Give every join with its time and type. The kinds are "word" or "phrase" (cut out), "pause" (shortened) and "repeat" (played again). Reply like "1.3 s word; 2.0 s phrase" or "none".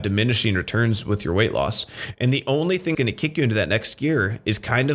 2.9 s word

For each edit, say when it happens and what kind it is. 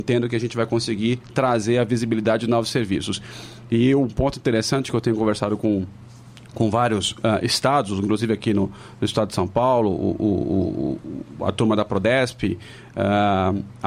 none

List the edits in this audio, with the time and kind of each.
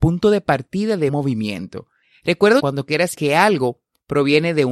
1.1 s word; 2.6 s word; 3.1 s word

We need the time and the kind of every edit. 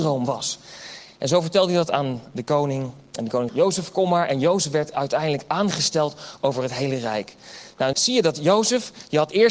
3.5 s word; 7.9 s word

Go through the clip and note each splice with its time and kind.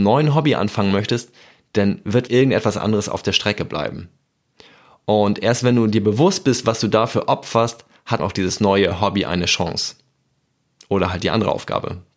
2.3 s word; 8.2 s word

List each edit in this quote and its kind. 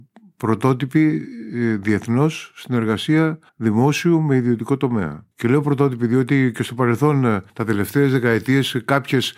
3.5 s pause; 5.3 s pause; 7.5 s pause

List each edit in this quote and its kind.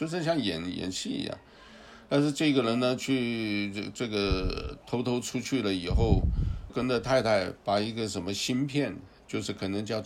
6.7 s word

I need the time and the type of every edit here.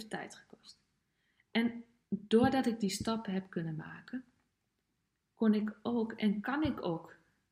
none

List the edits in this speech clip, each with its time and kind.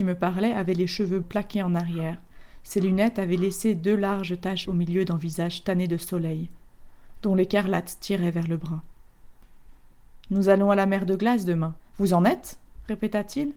1.2 s word; 4.6 s word

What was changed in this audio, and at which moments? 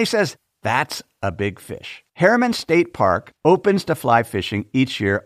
2.1 s pause; 3.4 s pause

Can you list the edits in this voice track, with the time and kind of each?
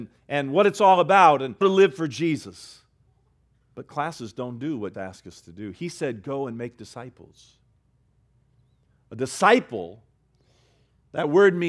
1.6 s word; 3.1 s pause; 4.9 s word

